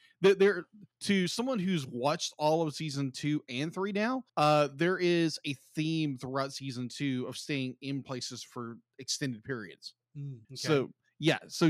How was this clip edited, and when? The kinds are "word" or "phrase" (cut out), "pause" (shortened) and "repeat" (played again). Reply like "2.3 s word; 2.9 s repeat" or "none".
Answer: 0.9 s pause; 4.3 s pause; 10.4 s pause

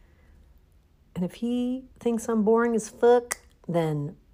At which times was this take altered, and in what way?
1.9 s pause

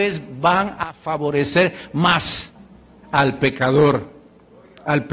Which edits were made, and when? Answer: none

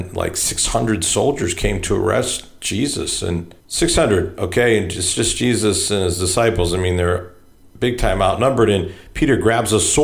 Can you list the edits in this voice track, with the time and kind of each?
3.6 s pause

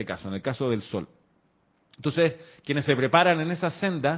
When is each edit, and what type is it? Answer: none

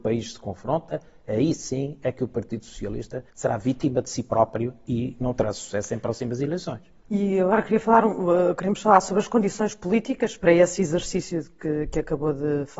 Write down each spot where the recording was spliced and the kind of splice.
3.3 s pause; 10.4 s word

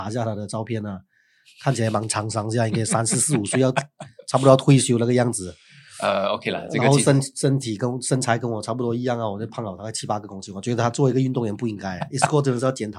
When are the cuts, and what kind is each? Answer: none

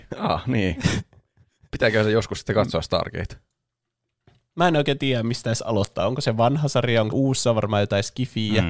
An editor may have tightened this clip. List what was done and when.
7.1 s word

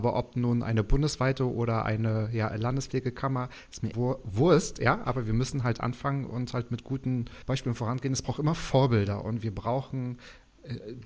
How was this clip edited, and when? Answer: 3.9 s phrase; 7.4 s pause

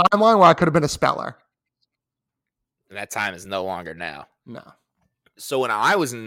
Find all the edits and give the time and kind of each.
none

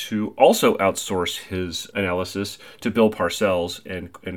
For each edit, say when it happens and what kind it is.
none

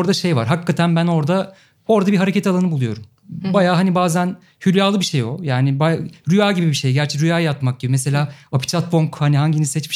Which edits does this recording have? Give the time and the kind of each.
none

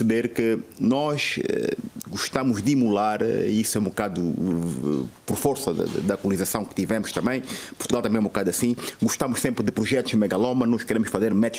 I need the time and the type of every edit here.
5.2 s pause

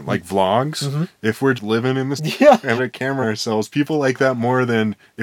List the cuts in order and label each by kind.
1.5 s word; 2.2 s word; 2.8 s word; 3.2 s word

